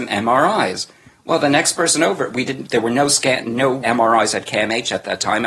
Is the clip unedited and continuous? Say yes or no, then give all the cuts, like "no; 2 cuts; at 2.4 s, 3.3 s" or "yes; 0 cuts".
no; 1 cut; at 3.8 s